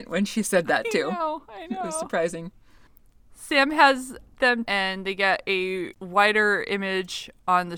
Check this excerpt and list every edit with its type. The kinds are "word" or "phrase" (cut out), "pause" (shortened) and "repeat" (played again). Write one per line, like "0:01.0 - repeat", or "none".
0:04.6 - phrase